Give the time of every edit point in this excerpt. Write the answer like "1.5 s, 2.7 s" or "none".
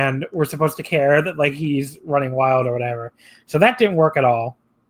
none